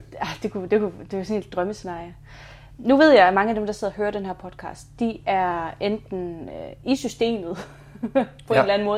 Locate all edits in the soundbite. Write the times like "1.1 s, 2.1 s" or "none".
none